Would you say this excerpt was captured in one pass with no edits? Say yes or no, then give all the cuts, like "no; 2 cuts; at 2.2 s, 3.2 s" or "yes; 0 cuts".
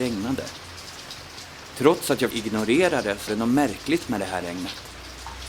no; 2 cuts; at 2.3 s, 3.3 s